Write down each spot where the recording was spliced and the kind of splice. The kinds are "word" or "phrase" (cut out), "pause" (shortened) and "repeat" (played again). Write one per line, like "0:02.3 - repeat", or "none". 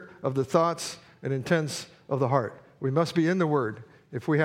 none